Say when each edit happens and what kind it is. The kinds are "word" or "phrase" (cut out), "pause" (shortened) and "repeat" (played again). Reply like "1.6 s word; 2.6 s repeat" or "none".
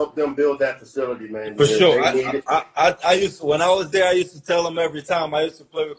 none